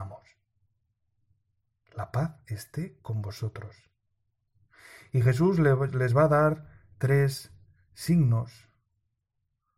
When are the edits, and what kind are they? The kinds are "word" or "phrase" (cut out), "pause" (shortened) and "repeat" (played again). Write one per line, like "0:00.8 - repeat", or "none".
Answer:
none